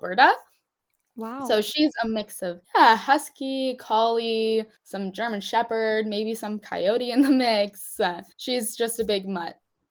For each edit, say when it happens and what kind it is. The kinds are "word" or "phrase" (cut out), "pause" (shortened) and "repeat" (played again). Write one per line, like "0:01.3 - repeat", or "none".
0:02.6 - pause
0:04.8 - pause
0:08.3 - pause